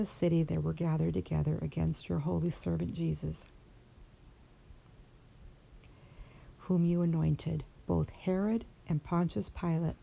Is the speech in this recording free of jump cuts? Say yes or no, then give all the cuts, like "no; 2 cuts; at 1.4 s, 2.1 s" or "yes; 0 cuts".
yes; 0 cuts